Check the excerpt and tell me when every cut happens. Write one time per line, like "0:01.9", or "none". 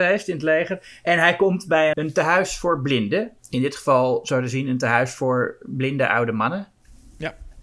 0:01.9
0:03.4